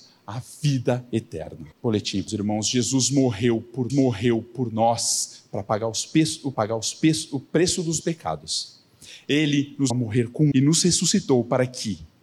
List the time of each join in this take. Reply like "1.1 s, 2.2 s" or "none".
1.7 s, 2.3 s, 3.9 s, 6.5 s, 8.0 s, 9.9 s, 10.5 s